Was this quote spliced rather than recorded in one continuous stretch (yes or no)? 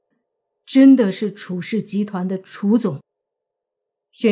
yes